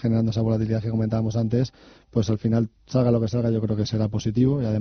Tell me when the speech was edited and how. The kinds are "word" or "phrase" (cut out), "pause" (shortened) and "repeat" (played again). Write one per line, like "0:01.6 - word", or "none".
none